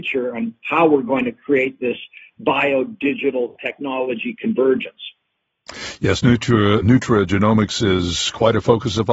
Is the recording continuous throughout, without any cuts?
no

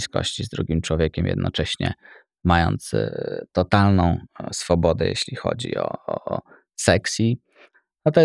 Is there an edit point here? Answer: no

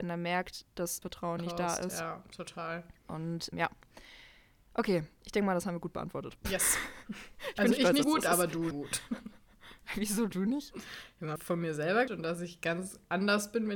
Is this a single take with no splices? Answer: no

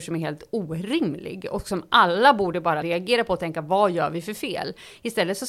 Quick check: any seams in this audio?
yes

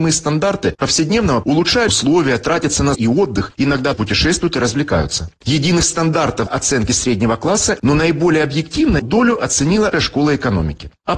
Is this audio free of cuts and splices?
no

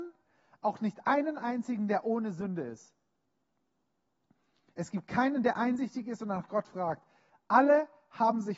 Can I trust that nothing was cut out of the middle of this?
yes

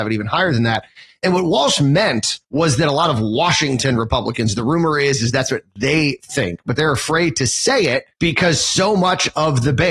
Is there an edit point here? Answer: yes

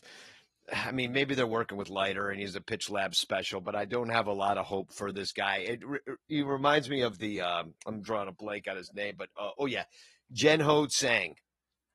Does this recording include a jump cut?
no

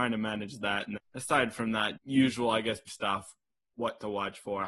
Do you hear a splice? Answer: yes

